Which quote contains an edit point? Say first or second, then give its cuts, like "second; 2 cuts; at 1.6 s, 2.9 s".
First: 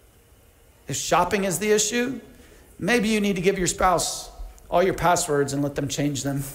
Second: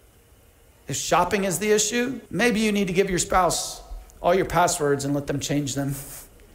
second; 1 cut; at 2.3 s